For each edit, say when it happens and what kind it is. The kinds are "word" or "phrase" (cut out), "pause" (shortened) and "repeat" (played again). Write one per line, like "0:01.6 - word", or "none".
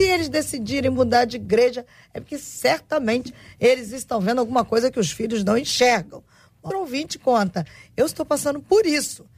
0:06.7 - word